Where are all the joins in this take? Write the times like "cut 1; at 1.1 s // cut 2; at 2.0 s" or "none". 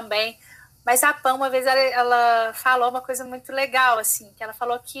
none